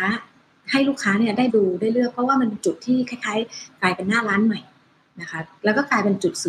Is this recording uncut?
no; 1 cut; at 1.5 s

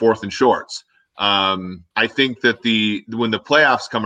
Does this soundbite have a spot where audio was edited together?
yes; 1 cut; at 1.9 s

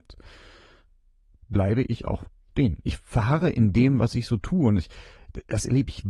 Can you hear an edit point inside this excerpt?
no; 0 cuts

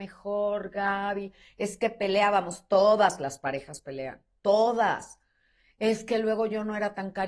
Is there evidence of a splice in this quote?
no; 0 cuts

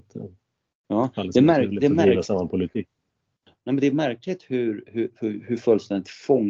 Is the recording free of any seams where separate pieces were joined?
yes; 0 cuts

